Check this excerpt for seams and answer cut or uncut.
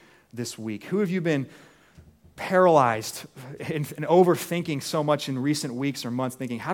uncut